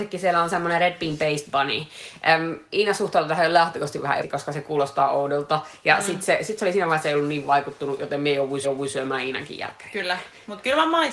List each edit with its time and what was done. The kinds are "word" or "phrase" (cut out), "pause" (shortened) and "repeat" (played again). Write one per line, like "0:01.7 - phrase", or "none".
0:04.2 - word
0:07.0 - phrase
0:08.6 - repeat